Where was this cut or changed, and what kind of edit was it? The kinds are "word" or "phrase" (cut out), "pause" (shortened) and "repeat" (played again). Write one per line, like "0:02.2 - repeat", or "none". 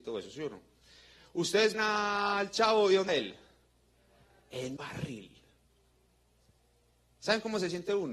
0:01.7 - word
0:03.1 - word
0:04.8 - word

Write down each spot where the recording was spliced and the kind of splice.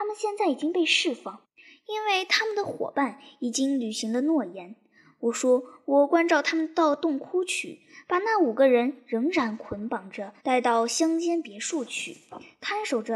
0:10.4 - pause

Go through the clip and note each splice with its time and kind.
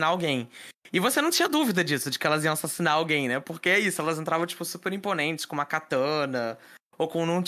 none

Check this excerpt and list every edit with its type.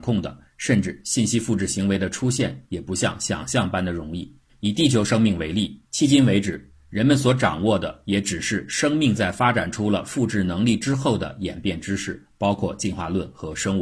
0:04.5 - pause
0:05.8 - pause

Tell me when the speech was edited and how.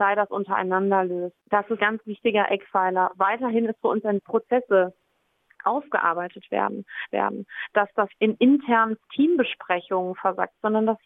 0:01.4 - pause
0:01.8 - word
0:04.2 - phrase
0:07.1 - repeat
0:08.1 - word
0:09.0 - pause

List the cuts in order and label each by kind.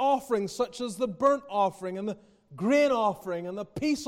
none

